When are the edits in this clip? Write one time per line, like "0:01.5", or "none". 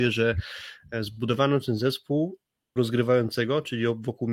0:02.8